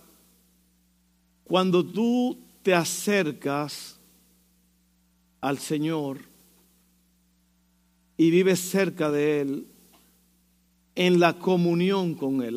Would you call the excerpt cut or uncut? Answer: uncut